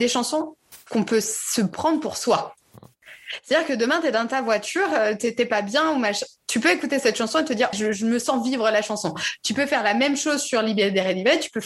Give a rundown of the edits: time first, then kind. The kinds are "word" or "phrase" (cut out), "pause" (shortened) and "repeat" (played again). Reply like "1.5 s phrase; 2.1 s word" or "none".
7.7 s word